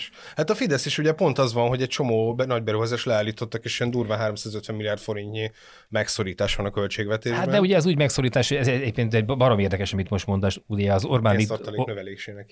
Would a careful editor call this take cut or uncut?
uncut